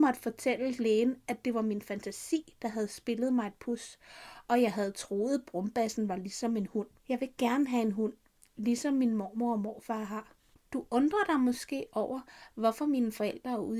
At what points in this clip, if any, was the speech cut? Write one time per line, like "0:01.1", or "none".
0:07.0